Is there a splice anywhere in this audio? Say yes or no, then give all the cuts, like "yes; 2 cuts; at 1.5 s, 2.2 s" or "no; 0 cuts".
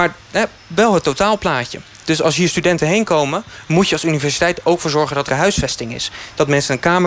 yes; 1 cut; at 5.3 s